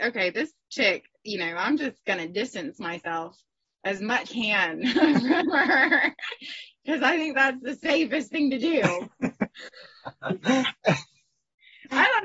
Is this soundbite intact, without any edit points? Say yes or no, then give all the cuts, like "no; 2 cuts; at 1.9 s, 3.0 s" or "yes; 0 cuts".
no; 1 cut; at 4.3 s